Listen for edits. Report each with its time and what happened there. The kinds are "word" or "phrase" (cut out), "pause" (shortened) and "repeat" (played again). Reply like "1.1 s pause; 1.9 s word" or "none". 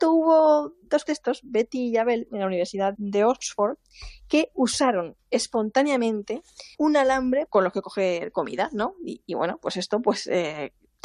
1.1 s word; 2.9 s word; 6.7 s pause; 7.5 s phrase